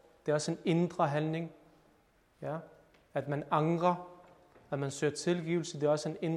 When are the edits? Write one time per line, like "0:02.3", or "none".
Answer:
none